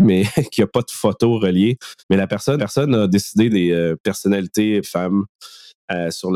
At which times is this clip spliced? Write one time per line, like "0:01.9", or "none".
0:02.0
0:02.6
0:03.5
0:04.8